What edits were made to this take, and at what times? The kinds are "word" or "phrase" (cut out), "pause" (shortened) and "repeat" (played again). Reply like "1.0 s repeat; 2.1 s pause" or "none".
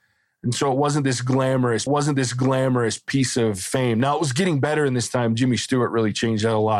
1.9 s repeat